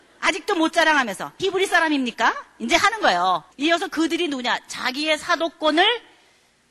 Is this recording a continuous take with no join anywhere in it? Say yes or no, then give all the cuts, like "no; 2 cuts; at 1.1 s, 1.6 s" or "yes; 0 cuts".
no; 2 cuts; at 1.4 s, 3.5 s